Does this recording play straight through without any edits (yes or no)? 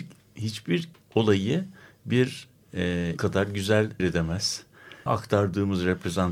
no